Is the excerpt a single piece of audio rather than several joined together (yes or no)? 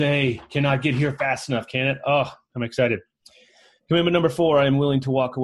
yes